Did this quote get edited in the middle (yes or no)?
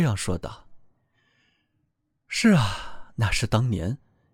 no